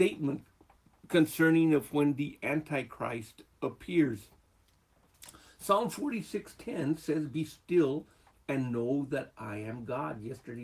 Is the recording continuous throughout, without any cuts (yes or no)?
yes